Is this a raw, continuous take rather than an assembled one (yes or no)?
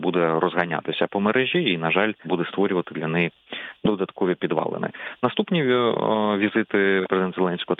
no